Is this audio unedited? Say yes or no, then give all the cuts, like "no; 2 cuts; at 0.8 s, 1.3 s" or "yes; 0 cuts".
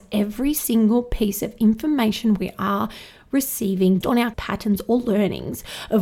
no; 2 cuts; at 4.0 s, 4.3 s